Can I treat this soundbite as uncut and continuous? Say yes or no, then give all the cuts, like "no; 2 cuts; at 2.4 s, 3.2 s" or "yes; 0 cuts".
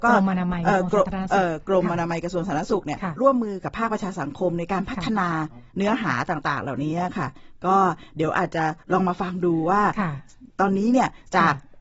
no; 1 cut; at 5.7 s